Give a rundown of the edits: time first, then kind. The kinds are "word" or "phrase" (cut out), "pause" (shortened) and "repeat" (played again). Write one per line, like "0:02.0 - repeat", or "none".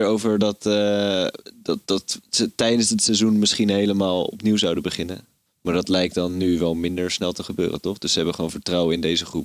0:01.8 - pause
0:05.5 - pause

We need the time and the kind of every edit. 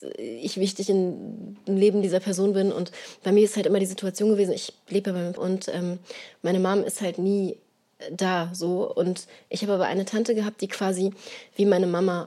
0:05.4 - word

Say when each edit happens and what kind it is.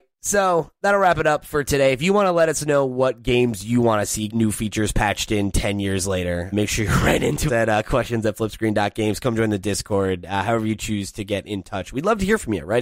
0:04.3 - word
0:06.5 - word
0:07.5 - word

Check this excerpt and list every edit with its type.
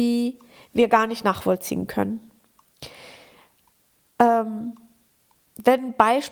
none

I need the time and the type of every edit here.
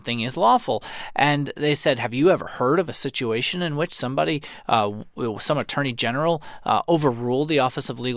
none

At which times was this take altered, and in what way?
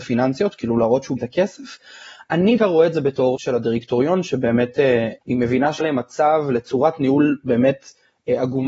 0:01.2 - phrase
0:02.6 - word
0:03.4 - word
0:05.2 - pause
0:05.8 - word

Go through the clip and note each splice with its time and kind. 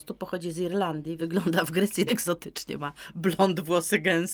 0:01.2 - word
0:02.1 - word
0:02.8 - word

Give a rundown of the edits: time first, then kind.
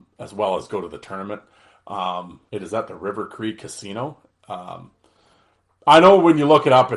0:02.5 - pause

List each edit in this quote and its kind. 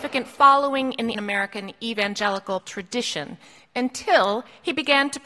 0:01.1 - word
0:02.6 - word

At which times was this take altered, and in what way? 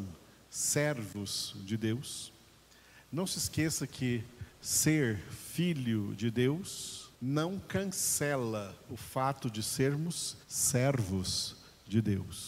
0:07.1 - pause
0:10.4 - pause

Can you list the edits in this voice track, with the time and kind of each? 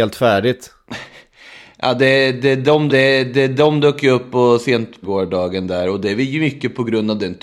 0:02.9 - repeat
0:05.0 - phrase

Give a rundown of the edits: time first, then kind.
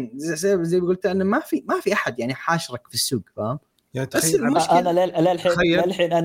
none

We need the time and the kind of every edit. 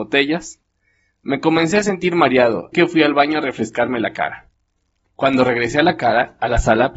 0:02.7 - word

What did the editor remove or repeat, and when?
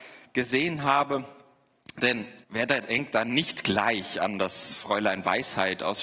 0:02.4 - pause

